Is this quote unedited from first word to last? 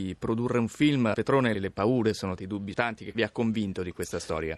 no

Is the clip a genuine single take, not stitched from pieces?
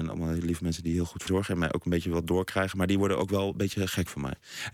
no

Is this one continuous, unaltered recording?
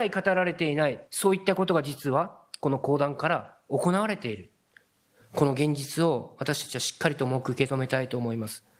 no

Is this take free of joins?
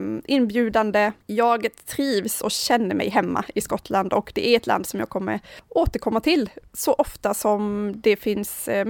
no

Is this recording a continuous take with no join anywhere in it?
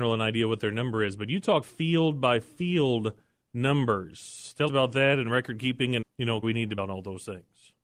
no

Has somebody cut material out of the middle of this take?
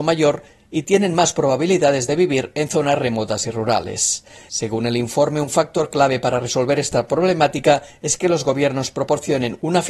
no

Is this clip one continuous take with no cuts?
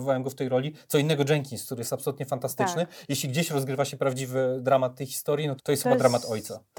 no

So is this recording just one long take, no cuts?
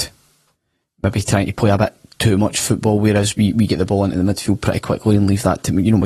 yes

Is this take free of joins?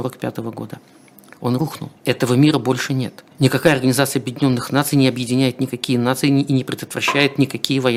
no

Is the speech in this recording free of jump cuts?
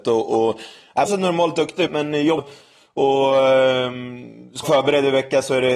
no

